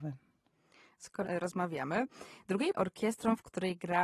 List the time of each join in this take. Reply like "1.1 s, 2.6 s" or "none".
1.2 s, 2.7 s